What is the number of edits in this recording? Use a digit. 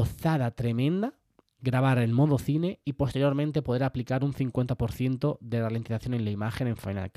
1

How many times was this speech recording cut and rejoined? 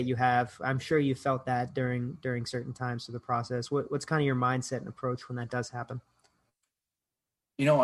0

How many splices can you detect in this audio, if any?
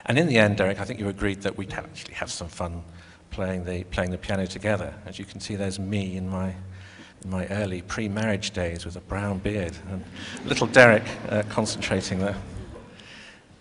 2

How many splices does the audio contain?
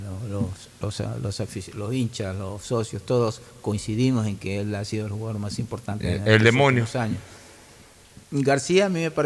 1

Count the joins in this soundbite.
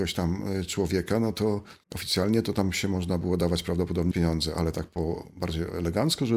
2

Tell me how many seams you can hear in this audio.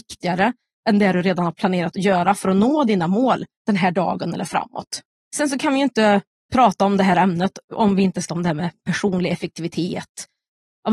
3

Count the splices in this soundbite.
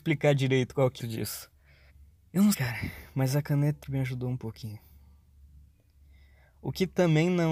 4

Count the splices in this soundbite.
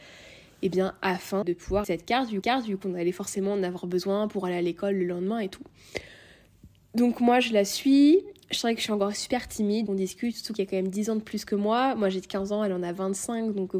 5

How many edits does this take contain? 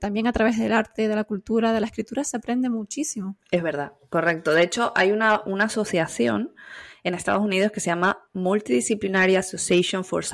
1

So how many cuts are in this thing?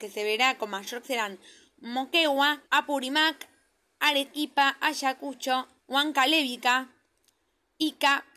3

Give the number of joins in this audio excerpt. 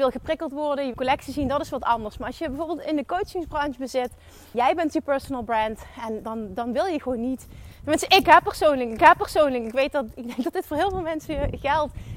4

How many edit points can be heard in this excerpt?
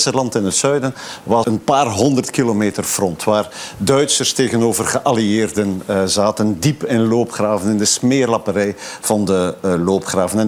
1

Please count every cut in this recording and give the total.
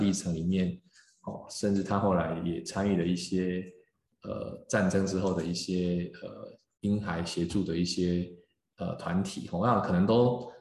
0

